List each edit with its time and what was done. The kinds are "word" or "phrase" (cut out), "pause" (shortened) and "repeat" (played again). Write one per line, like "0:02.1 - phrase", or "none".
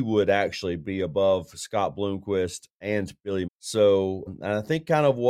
0:03.5 - word
0:04.3 - word